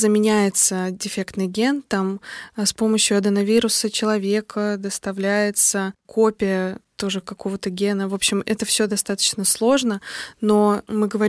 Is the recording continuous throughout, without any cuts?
yes; 0 cuts

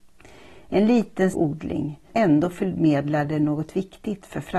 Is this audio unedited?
no; 2 cuts; at 1.3 s, 2.1 s

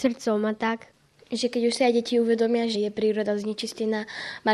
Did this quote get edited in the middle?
yes; 1 cut; at 2.7 s

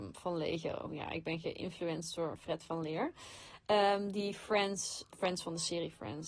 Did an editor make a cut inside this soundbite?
yes; 1 cut; at 5.1 s

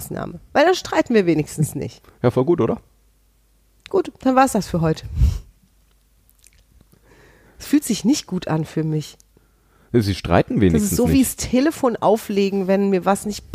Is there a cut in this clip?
no; 0 cuts

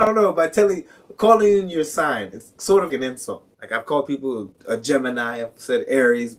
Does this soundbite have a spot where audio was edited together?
yes; 2 cuts; at 2.9 s, 3.5 s

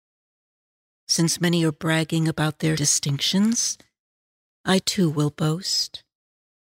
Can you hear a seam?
yes; 1 cut; at 2.8 s

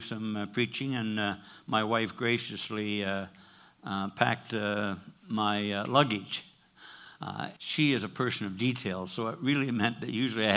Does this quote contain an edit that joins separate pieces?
yes; 2 cuts; at 5.2 s, 7.6 s

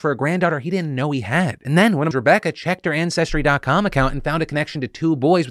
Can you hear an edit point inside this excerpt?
yes; 1 cut; at 2.1 s

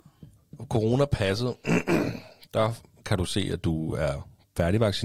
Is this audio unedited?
yes; 0 cuts

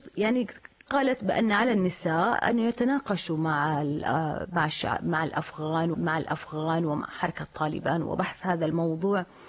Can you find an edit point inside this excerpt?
yes; 1 cut; at 5.9 s

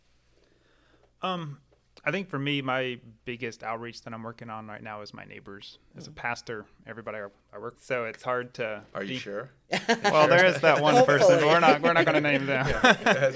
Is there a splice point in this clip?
yes; 1 cut; at 7.7 s

